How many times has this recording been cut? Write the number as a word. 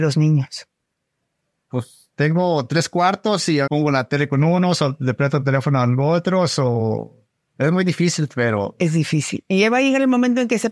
one